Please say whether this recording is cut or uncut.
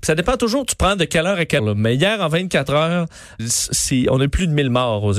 cut